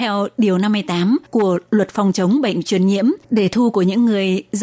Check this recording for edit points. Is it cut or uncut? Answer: cut